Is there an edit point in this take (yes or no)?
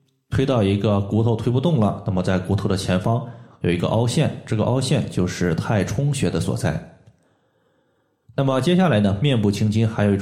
no